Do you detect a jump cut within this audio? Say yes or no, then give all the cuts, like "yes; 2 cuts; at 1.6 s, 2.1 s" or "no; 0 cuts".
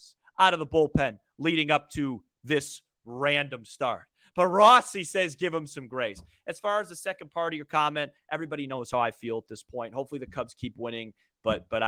no; 0 cuts